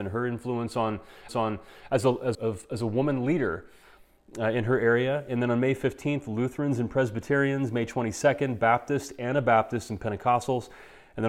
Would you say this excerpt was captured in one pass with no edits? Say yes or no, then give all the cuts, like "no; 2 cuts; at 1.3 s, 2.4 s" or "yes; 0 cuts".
no; 2 cuts; at 1.3 s, 2.3 s